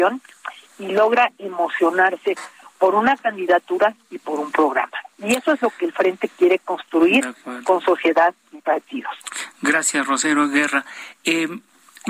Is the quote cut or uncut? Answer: uncut